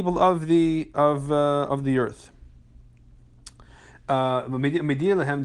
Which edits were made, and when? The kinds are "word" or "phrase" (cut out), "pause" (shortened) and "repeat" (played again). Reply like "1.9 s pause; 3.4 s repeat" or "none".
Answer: none